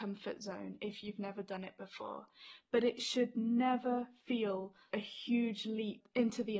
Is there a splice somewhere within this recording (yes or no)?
yes